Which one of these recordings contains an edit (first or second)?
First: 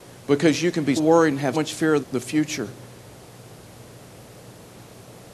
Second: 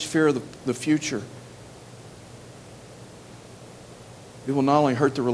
first